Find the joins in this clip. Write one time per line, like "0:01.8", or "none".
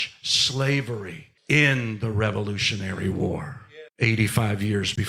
0:01.4
0:03.9

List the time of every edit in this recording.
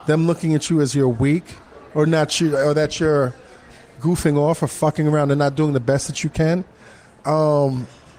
none

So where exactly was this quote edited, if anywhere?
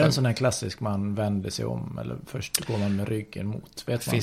none

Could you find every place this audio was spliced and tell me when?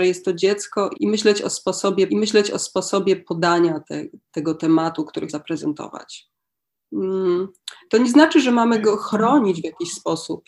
0:00.9
0:02.1
0:05.3

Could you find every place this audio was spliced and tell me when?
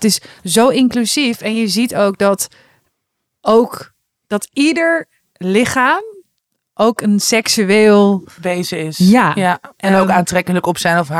none

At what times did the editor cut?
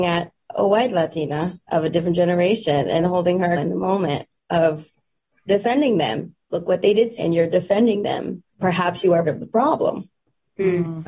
0:03.6
0:05.5
0:06.4
0:07.2
0:08.5
0:09.2

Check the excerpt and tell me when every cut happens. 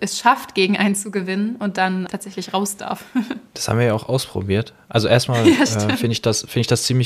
0:02.1
0:03.5

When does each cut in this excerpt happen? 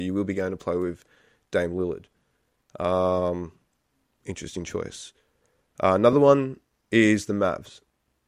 none

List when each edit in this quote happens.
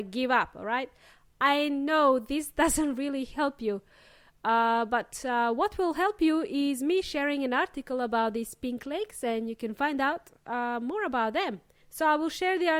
none

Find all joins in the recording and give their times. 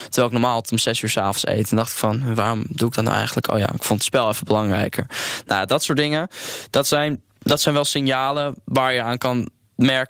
none

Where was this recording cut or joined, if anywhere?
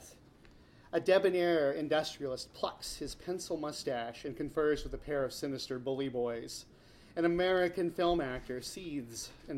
none

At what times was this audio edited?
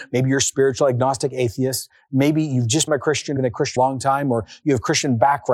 0:02.9
0:03.4
0:03.8

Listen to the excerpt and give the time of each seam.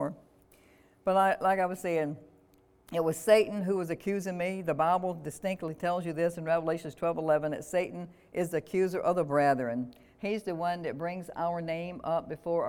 none

